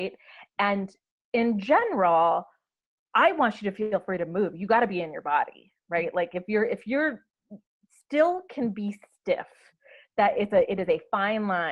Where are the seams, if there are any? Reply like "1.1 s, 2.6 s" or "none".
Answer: none